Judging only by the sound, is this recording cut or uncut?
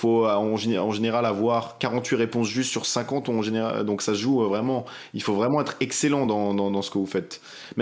uncut